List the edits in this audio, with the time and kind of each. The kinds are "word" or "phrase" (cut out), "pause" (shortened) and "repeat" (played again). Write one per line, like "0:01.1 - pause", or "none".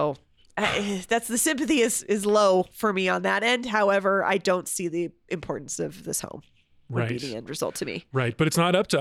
none